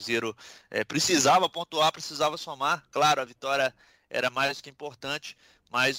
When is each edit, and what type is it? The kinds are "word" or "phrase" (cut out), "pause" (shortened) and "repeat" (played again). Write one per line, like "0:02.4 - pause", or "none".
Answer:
none